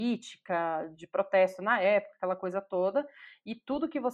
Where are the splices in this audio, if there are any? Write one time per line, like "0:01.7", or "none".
0:00.9